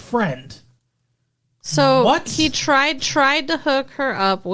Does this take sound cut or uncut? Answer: cut